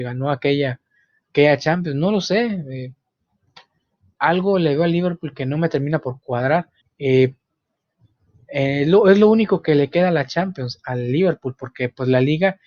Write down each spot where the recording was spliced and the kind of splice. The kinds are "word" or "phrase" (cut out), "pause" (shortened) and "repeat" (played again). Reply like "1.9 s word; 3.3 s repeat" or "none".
6.8 s pause